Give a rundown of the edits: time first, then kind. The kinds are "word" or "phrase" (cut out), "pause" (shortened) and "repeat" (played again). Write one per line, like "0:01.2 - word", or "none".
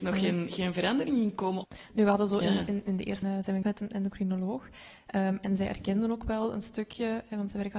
0:03.2 - phrase
0:03.6 - word